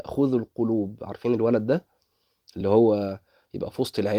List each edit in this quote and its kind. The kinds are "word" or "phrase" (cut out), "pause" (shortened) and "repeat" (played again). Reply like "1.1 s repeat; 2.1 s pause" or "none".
none